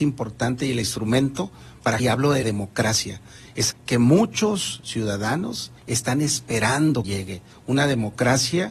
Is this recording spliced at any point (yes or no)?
yes